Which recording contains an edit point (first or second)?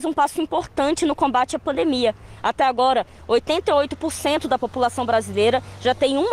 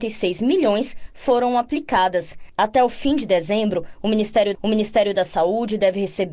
second